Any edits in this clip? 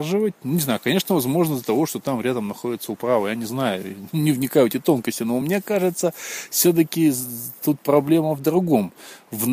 no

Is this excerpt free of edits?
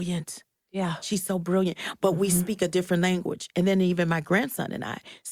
yes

